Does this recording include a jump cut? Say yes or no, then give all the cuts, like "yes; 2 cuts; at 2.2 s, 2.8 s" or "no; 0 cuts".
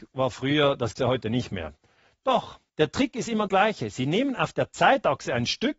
yes; 3 cuts; at 0.9 s, 2.7 s, 3.5 s